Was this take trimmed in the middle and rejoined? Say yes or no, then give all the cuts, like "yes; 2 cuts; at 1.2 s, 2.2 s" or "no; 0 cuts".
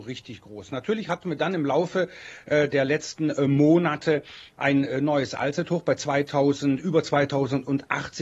no; 0 cuts